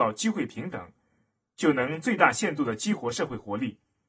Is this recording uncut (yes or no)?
yes